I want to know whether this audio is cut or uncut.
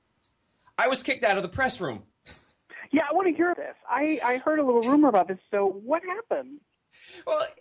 cut